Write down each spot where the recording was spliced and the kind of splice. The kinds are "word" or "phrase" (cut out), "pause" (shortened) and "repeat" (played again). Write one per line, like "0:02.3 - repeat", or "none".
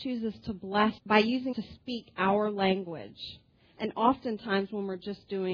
0:01.0 - word
0:01.5 - word